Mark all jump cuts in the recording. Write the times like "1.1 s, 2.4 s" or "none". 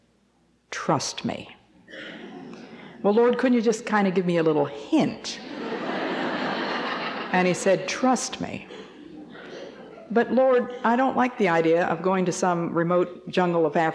none